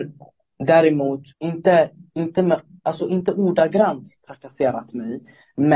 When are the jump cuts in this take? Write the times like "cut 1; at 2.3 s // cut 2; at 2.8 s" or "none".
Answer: cut 1; at 1.3 s

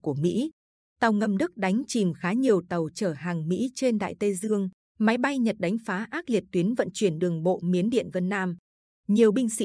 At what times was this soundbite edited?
cut 1; at 4.8 s

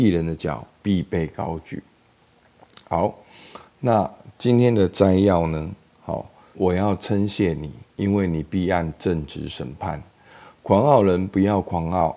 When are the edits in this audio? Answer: cut 1; at 6.5 s

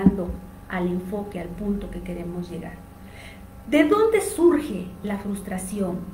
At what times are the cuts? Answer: none

